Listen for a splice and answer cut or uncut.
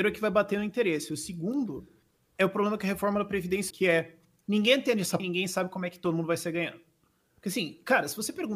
cut